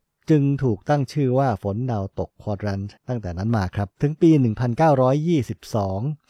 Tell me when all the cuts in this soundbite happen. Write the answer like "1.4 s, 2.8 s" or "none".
3.0 s, 3.9 s